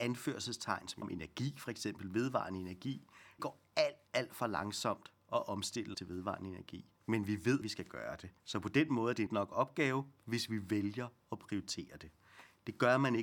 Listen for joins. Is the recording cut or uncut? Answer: cut